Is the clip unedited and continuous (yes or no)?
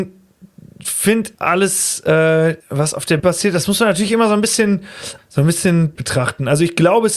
no